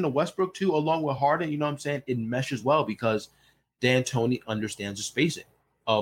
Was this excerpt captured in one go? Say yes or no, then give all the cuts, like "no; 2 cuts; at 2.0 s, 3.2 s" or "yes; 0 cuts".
yes; 0 cuts